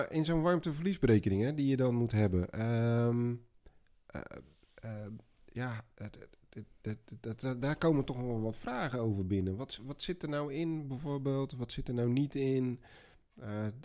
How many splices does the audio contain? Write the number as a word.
zero